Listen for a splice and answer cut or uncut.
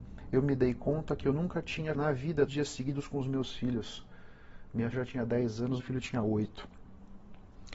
cut